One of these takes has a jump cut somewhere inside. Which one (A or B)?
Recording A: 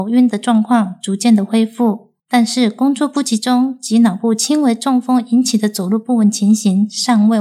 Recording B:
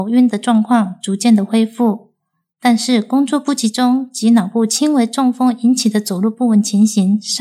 A